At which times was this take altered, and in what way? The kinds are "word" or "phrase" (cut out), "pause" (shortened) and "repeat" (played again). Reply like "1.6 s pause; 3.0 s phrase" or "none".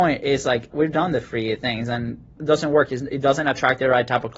none